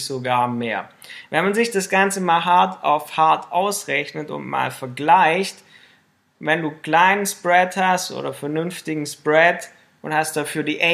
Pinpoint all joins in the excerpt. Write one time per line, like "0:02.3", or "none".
none